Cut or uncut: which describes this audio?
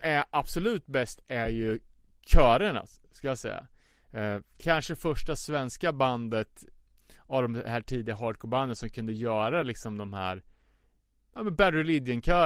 uncut